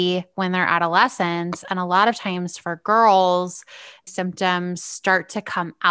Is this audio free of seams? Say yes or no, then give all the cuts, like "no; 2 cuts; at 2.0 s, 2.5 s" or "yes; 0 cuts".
no; 1 cut; at 4.1 s